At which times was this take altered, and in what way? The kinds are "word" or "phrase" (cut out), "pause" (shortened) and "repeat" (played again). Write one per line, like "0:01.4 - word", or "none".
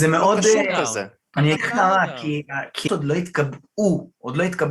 0:01.6 - word
0:02.9 - word